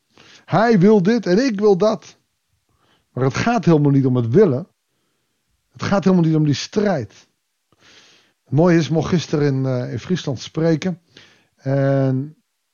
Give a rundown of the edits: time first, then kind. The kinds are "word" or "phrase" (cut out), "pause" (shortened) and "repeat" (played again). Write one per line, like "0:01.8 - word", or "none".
none